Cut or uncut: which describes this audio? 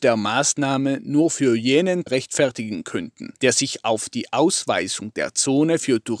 cut